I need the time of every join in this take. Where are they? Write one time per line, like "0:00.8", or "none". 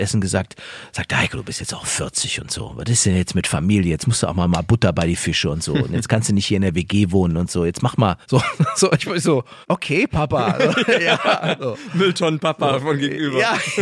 0:08.2
0:09.6